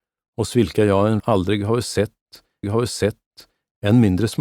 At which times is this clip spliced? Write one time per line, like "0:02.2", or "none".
0:01.2
0:02.6